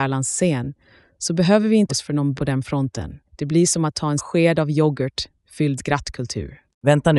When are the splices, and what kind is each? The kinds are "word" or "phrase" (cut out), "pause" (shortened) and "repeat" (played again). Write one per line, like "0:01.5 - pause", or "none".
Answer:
0:01.9 - word
0:02.4 - word
0:03.3 - pause
0:04.2 - word
0:05.8 - word